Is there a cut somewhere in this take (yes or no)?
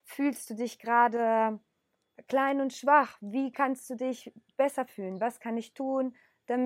no